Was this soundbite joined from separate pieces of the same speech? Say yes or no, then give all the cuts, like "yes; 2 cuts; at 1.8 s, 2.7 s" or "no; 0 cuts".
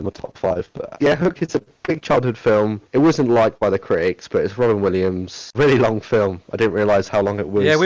yes; 3 cuts; at 0.9 s, 2.8 s, 5.5 s